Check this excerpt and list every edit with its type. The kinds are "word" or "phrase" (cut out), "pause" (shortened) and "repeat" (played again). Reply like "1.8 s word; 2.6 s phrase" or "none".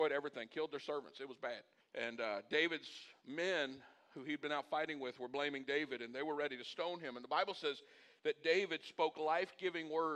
1.8 s pause